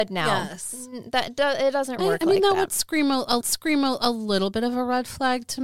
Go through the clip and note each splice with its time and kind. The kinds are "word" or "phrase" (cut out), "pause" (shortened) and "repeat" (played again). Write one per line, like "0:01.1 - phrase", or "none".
0:02.0 - word
0:03.4 - repeat